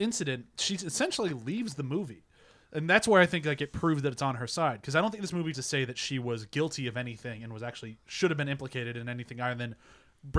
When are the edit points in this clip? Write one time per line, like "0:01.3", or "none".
0:05.5